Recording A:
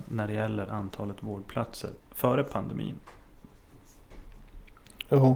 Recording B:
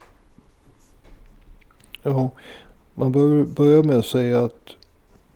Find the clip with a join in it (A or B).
A